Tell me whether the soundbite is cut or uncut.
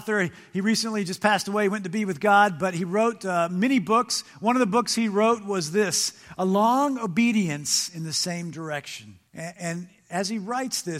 cut